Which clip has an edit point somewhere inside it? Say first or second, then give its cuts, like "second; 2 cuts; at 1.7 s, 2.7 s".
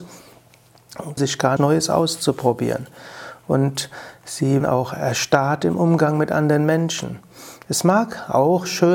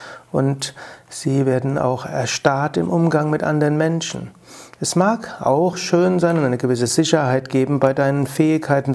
first; 3 cuts; at 1.2 s, 1.6 s, 4.6 s